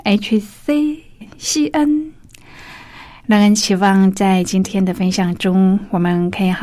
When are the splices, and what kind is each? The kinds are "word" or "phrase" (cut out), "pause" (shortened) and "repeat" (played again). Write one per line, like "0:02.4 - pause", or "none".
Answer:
0:01.2 - word